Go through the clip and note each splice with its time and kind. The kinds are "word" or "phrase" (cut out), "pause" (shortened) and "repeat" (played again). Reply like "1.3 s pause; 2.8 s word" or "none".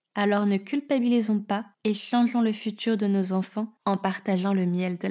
1.7 s pause; 3.8 s pause